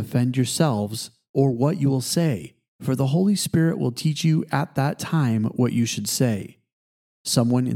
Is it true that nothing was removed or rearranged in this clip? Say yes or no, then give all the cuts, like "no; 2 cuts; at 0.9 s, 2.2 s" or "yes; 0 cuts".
yes; 0 cuts